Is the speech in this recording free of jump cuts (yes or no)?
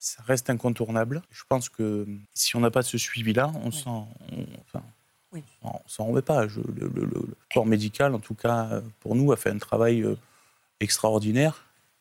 no